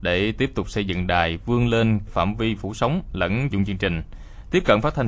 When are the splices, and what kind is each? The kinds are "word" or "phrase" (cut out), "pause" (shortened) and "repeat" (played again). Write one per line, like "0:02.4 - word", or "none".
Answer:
0:02.1 - phrase
0:03.5 - phrase